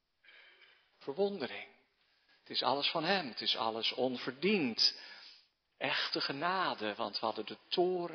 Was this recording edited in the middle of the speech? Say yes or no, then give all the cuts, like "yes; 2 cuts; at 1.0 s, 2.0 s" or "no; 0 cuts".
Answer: no; 0 cuts